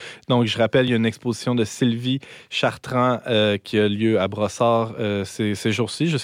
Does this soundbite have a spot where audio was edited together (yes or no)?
no